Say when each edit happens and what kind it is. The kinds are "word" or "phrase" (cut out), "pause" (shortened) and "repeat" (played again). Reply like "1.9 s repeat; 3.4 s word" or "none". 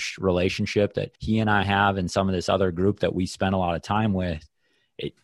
1.2 s pause